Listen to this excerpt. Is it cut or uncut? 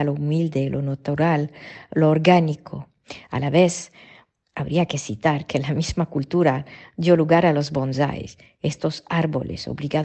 uncut